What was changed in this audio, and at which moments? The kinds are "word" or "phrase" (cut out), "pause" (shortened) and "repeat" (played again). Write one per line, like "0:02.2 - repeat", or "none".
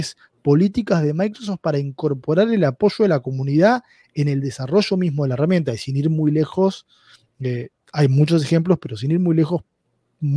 none